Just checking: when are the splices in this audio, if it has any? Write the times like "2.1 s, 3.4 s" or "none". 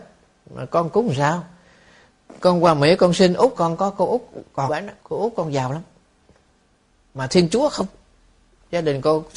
3.6 s, 4.7 s, 5.0 s